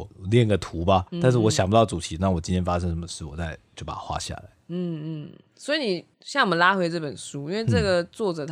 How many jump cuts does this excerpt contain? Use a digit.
2